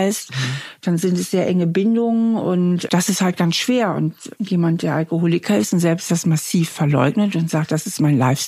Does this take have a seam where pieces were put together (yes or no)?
yes